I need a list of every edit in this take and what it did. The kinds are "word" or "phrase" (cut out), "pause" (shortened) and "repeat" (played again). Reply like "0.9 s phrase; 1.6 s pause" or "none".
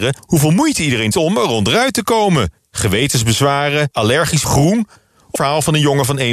1.1 s word; 3.9 s word; 4.4 s word; 5.4 s word

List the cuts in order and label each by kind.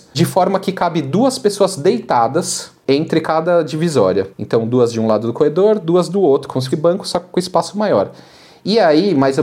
4.3 s pause; 6.7 s word

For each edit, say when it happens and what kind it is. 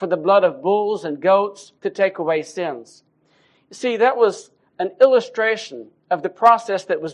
1.8 s pause

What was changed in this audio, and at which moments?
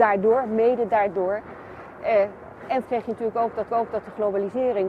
2.8 s word; 3.7 s repeat

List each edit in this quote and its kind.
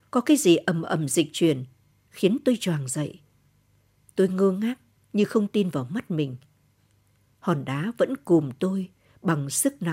none

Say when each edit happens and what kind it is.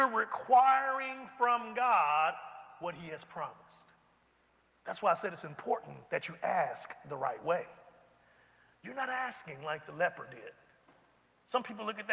4.2 s pause; 6.0 s pause

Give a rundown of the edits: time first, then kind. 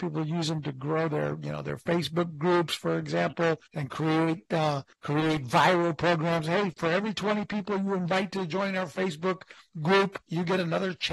3.7 s pause; 4.9 s pause

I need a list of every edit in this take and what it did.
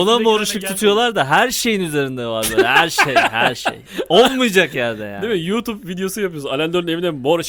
none

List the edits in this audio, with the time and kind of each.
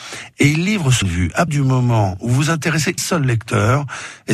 1.0 s word; 1.5 s word; 3.0 s word

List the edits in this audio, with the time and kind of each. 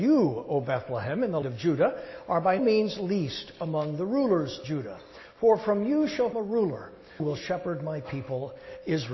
1.4 s word; 2.6 s word; 4.6 s word; 6.3 s word; 7.2 s word

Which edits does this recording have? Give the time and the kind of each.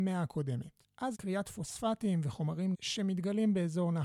1.1 s word; 2.7 s word

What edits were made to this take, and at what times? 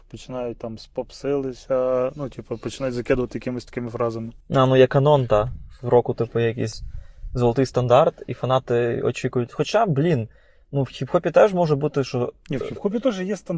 4.4 s pause

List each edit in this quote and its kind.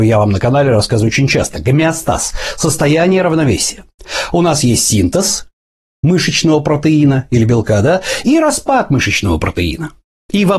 none

